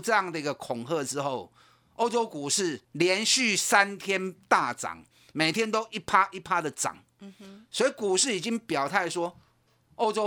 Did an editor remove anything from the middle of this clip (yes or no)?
yes